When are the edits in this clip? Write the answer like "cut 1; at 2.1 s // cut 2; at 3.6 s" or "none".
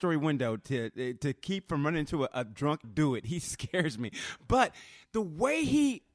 cut 1; at 2.8 s